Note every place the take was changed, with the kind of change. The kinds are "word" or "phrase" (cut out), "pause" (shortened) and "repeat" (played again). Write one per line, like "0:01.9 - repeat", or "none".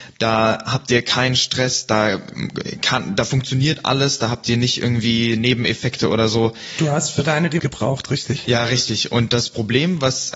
0:07.6 - word

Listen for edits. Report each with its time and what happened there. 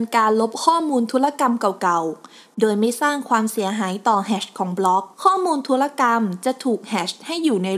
0:05.1 - pause

